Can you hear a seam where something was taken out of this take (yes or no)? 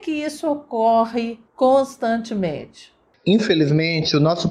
yes